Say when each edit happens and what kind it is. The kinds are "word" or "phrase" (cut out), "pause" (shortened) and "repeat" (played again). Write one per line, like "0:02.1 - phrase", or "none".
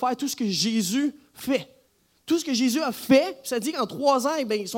0:01.9 - pause